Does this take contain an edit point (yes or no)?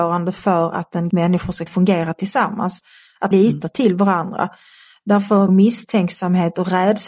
yes